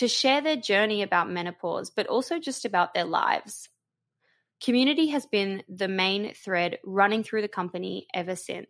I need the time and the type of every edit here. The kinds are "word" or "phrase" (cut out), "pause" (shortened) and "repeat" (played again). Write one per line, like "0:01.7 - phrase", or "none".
none

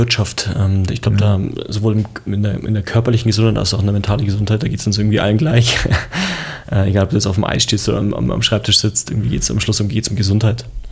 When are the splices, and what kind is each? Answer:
none

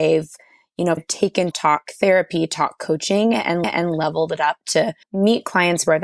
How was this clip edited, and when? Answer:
0:01.0 - word
0:01.5 - word
0:03.6 - repeat
0:05.0 - pause

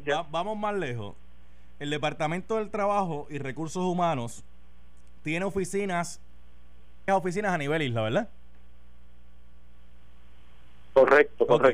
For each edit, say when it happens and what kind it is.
0:07.1 - word

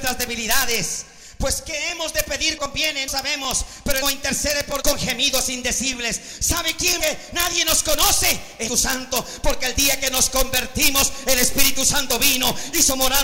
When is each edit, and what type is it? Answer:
0:02.6 - word
0:03.1 - word
0:04.0 - phrase
0:04.8 - word
0:07.0 - word
0:08.7 - word

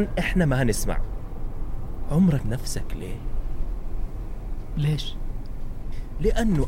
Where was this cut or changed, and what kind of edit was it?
0:02.4 - word

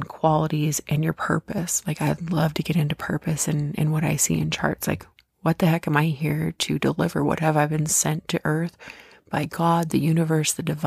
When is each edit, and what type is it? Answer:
none

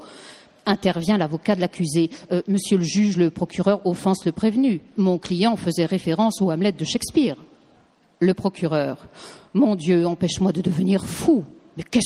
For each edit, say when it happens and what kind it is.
0:04.9 - pause

